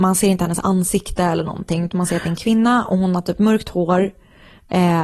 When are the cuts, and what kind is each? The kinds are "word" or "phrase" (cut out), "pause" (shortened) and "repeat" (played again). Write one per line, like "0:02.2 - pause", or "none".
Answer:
none